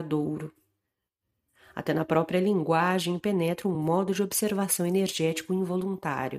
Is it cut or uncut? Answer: uncut